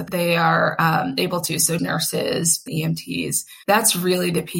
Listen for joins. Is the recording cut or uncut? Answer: cut